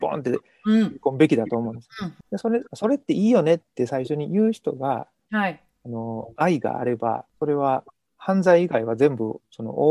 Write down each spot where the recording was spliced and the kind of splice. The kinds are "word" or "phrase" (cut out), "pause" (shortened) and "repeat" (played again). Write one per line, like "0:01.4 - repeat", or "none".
none